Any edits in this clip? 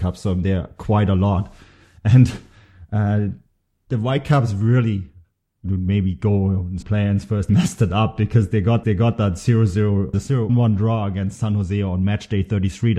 yes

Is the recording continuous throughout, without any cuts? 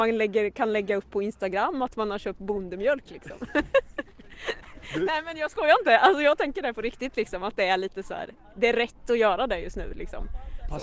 yes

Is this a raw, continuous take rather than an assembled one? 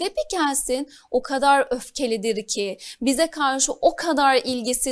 yes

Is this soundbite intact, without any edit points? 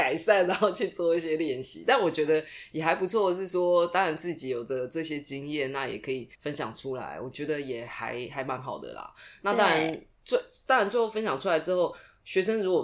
no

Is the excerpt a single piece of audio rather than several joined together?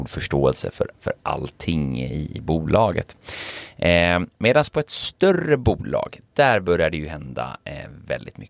yes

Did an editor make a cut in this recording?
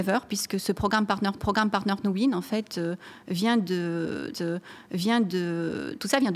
yes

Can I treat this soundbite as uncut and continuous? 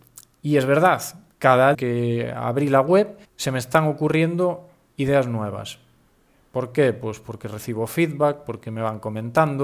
no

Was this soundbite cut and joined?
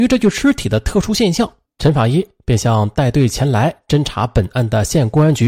yes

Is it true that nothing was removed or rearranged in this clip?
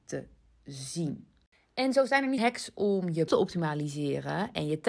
no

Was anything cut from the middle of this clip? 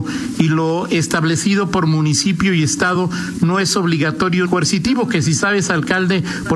yes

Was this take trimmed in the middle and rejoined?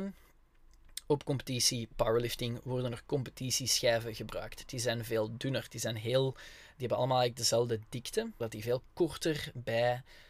yes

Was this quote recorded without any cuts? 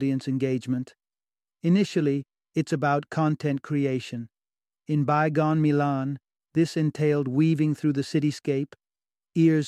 yes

